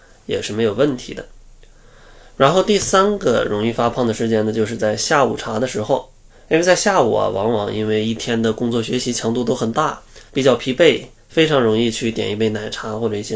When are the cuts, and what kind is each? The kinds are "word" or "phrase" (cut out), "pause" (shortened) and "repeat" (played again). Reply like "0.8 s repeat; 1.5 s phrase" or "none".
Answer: 6.3 s pause; 10.3 s pause; 11.2 s pause